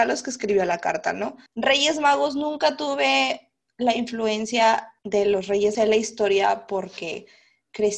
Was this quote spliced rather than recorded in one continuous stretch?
yes; 3 cuts; at 1.5 s, 5.0 s, 5.7 s

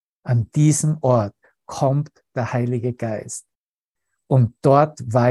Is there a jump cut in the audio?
no; 0 cuts

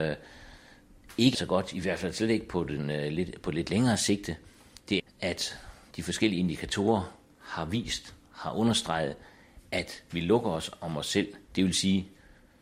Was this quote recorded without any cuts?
no; 3 cuts; at 1.3 s, 5.0 s, 11.4 s

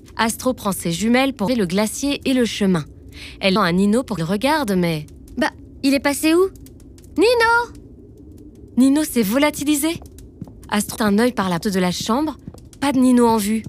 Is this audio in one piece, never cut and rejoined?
no; 6 cuts; at 1.5 s, 3.6 s, 4.2 s, 7.1 s, 11.0 s, 11.6 s

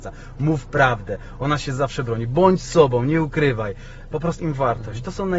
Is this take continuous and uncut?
no; 1 cut; at 4.4 s

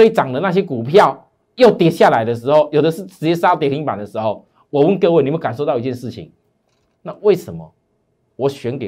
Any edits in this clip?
no; 0 cuts

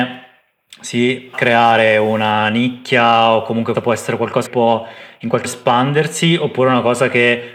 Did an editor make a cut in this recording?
yes; 4 cuts; at 1.3 s, 3.7 s, 4.5 s, 5.4 s

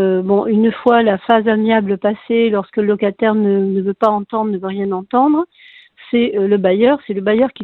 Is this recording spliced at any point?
no; 0 cuts

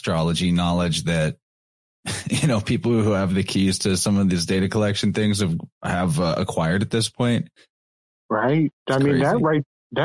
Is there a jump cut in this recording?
yes; 1 cut; at 8.8 s

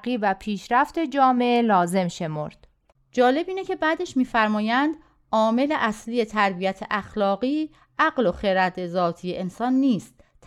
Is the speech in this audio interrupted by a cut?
no; 0 cuts

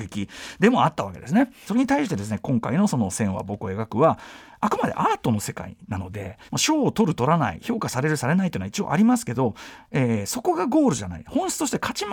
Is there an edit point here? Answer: yes; 2 cuts; at 1.7 s, 6.5 s

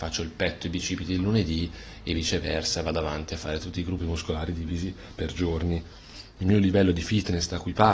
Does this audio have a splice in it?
no; 0 cuts

